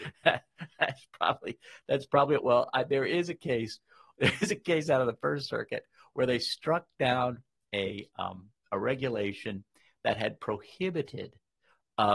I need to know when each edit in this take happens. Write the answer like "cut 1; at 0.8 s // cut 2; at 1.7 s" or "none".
none